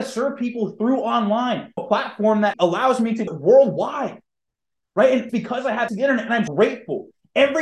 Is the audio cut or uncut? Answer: cut